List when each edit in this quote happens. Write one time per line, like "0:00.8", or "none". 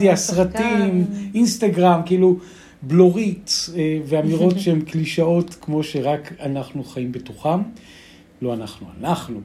none